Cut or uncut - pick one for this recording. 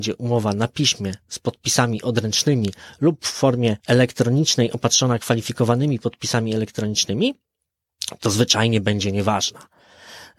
cut